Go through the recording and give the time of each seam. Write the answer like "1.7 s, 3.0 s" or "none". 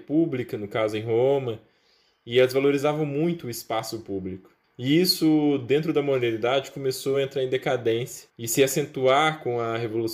none